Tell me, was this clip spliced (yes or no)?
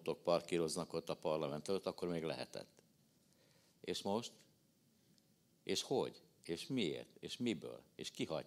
no